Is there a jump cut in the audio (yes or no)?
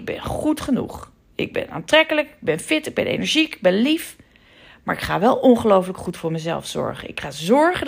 no